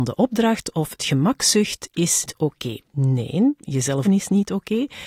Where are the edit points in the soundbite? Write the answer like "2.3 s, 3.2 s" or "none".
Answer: 1.0 s, 2.3 s, 2.9 s, 4.0 s